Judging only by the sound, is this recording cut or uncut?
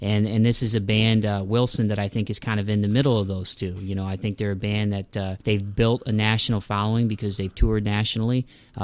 cut